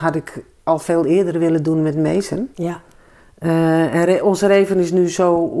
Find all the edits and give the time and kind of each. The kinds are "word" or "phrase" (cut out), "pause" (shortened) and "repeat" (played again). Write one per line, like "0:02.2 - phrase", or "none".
0:02.5 - pause

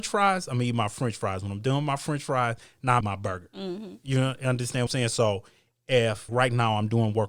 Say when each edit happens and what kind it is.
0:03.0 - word
0:04.9 - phrase
0:06.3 - word

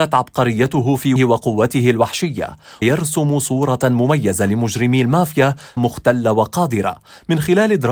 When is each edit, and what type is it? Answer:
0:01.2 - word
0:02.8 - word
0:05.8 - phrase

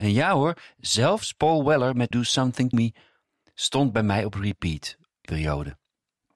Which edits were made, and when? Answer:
0:02.1 - word
0:02.7 - word
0:05.3 - word

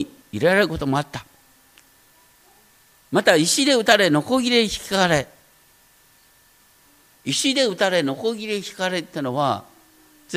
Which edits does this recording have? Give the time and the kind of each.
none

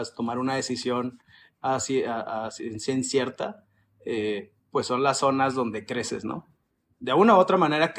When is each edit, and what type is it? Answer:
0:04.6 - pause

